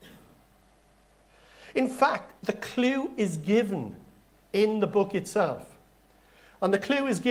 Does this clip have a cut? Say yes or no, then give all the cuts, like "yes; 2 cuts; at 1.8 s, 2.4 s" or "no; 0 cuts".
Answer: no; 0 cuts